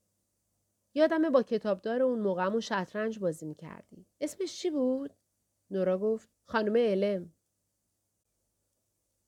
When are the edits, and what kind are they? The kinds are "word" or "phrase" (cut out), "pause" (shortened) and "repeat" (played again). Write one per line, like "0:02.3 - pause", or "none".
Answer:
0:04.1 - pause
0:05.3 - pause
0:06.3 - pause